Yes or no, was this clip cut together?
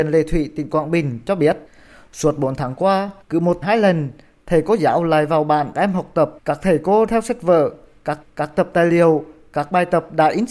yes